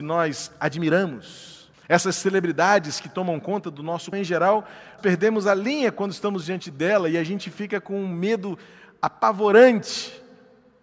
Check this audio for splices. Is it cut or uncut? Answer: cut